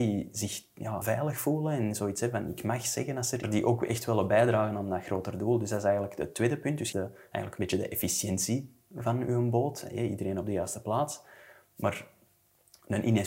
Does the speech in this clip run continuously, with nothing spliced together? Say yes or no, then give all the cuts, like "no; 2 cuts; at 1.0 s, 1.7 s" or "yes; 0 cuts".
no; 3 cuts; at 1.0 s, 3.4 s, 6.9 s